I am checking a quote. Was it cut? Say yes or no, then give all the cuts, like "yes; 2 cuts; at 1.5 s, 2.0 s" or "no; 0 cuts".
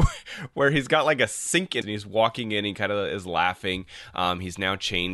yes; 1 cut; at 1.8 s